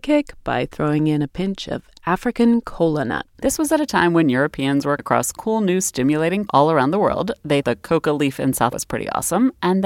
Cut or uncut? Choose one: cut